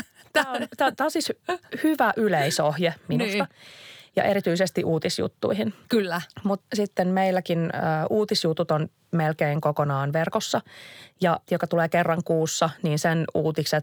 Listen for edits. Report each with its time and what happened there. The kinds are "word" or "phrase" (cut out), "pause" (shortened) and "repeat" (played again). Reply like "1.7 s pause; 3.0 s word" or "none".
5.8 s pause; 6.6 s word; 11.5 s word